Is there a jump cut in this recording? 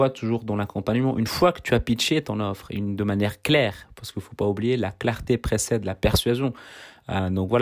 no; 0 cuts

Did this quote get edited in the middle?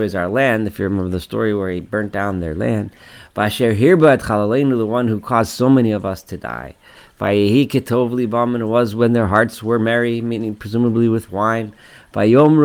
no; 0 cuts

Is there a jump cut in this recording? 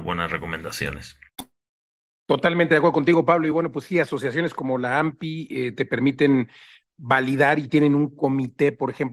no; 0 cuts

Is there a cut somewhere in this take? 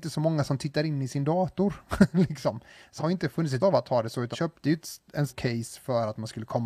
yes; 4 cuts; at 3.0 s, 3.6 s, 4.3 s, 5.3 s

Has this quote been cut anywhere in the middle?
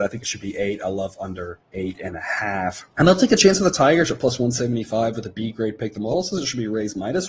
yes; 2 cuts; at 1.6 s, 2.9 s

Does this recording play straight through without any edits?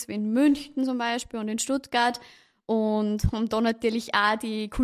yes; 0 cuts

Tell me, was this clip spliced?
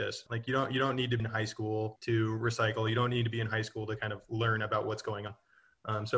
yes; 1 cut; at 1.2 s

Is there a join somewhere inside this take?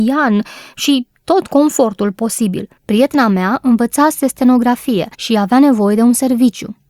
yes; 2 cuts; at 2.8 s, 5.1 s

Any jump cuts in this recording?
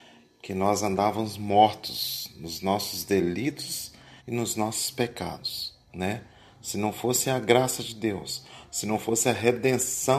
yes; 2 cuts; at 4.2 s, 5.8 s

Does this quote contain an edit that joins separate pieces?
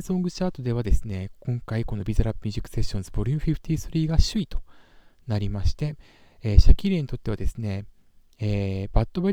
no; 0 cuts

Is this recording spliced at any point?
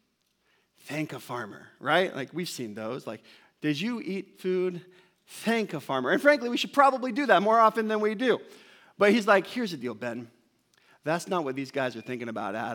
no; 0 cuts

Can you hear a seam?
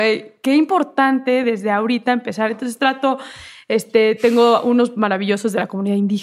no; 0 cuts

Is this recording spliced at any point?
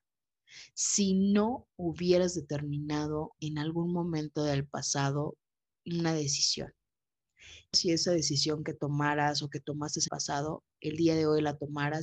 yes; 3 cuts; at 3.4 s, 7.7 s, 10.1 s

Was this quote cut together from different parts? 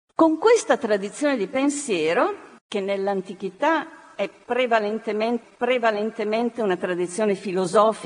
yes; 2 cuts; at 2.6 s, 5.4 s

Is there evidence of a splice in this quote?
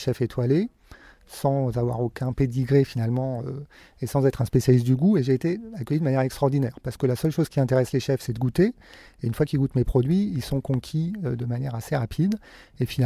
no; 0 cuts

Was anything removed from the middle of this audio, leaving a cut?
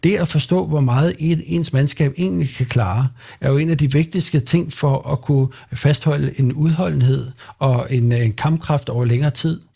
no; 0 cuts

